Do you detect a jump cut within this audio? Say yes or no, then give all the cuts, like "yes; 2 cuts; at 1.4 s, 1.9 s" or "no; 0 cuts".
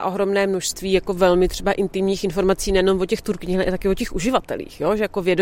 no; 0 cuts